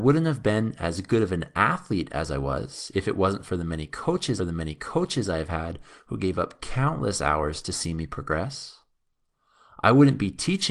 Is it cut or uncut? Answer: cut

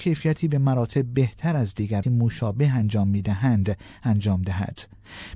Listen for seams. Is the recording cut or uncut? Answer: cut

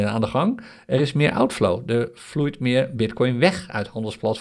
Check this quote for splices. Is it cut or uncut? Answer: uncut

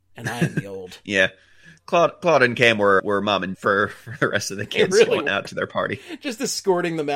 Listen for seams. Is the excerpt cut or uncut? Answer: cut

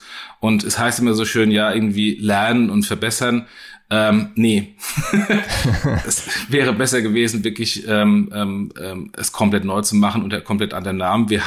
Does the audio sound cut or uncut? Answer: uncut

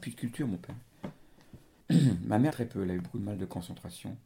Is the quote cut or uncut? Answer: cut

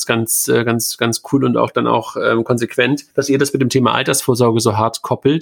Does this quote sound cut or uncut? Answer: cut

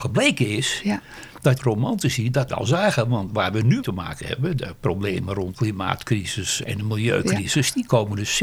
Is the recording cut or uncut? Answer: cut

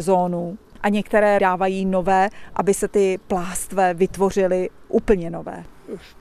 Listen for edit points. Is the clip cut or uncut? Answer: cut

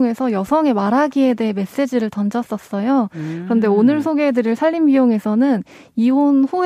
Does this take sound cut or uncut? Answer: uncut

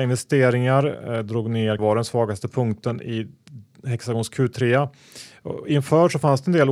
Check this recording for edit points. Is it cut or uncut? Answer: cut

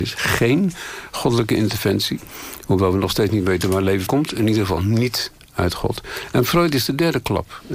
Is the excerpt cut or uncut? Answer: cut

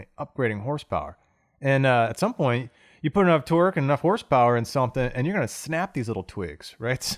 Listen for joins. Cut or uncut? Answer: uncut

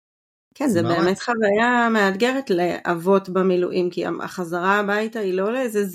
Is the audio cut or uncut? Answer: uncut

